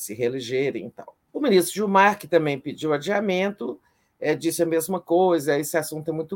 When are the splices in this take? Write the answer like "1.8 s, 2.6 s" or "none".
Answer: 1.3 s